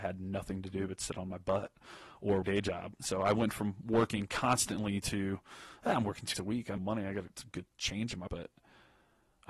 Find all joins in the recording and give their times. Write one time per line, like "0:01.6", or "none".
0:02.4
0:06.3
0:06.8
0:08.3